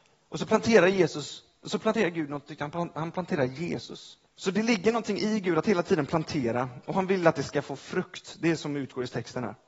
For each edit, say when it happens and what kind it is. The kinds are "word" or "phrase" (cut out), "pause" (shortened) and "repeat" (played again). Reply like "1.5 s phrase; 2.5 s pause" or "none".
4.3 s pause